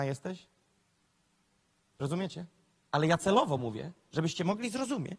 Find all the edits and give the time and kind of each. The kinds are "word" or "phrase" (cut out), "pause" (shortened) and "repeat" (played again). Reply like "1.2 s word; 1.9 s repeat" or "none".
none